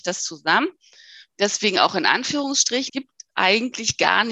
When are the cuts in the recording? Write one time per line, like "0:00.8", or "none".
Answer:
0:02.9